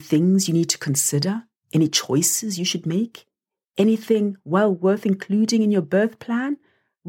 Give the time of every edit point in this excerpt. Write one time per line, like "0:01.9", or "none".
none